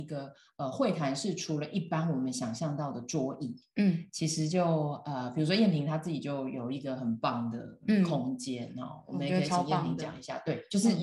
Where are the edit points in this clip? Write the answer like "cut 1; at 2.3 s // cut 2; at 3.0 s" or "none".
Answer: none